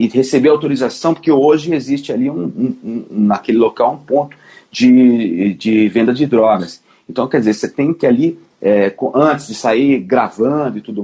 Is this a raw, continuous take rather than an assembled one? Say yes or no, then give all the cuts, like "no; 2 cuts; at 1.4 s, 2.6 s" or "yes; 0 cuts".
yes; 0 cuts